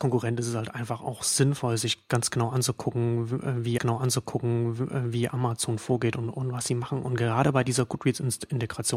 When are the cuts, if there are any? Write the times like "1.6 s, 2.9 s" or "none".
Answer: 3.8 s